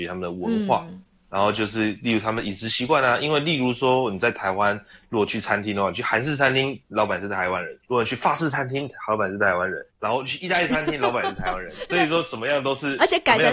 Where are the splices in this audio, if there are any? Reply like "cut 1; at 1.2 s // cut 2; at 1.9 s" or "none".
cut 1; at 7.8 s // cut 2; at 9.9 s // cut 3; at 11.9 s